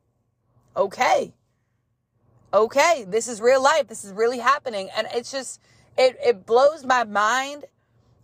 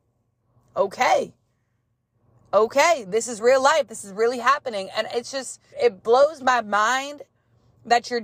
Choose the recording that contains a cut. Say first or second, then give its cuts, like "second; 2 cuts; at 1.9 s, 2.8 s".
second; 1 cut; at 5.7 s